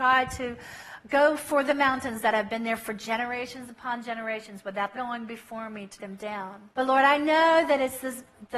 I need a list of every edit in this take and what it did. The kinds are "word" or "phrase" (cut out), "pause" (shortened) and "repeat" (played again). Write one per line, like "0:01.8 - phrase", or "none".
0:04.9 - phrase
0:06.0 - word
0:06.7 - pause